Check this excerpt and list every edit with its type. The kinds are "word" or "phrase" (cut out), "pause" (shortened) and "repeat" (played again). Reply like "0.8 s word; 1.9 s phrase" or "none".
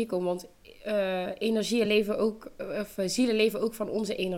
none